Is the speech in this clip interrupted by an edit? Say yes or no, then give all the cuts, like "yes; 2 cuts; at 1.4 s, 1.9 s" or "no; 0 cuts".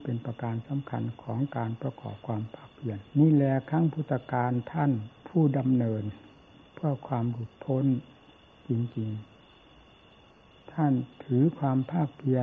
yes; 2 cuts; at 3.1 s, 5.2 s